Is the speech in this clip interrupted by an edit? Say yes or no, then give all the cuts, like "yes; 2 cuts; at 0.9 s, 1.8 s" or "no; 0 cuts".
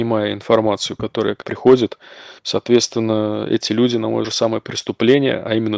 yes; 3 cuts; at 1.4 s, 2.4 s, 4.2 s